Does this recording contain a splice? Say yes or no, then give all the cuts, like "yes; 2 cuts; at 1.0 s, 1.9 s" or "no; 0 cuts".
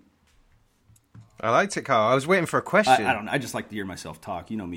yes; 1 cut; at 1.3 s